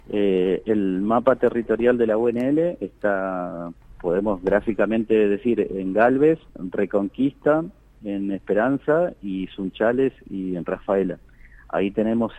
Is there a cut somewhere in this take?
yes; 1 cut; at 6.5 s

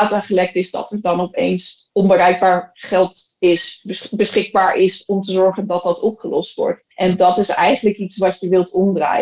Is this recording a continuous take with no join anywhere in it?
no; 1 cut; at 6.9 s

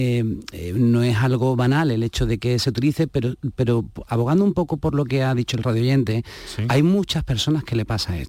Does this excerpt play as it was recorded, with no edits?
yes; 0 cuts

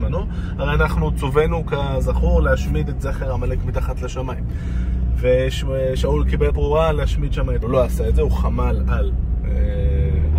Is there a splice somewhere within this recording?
yes; 2 cuts; at 6.5 s, 7.6 s

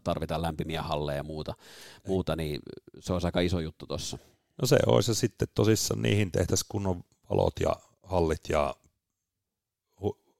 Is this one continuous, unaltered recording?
yes; 0 cuts

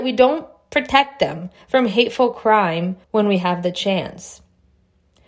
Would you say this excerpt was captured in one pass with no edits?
no; 1 cut; at 3.0 s

